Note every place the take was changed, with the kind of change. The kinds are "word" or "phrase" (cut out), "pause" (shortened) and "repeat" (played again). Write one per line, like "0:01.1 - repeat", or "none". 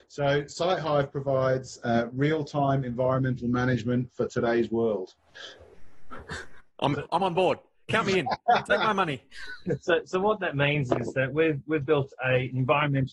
none